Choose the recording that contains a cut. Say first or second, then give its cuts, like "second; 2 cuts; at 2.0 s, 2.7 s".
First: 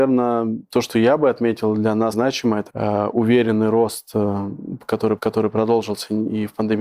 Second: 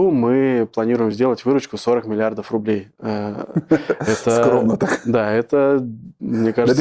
first; 3 cuts; at 2.1 s, 2.7 s, 5.2 s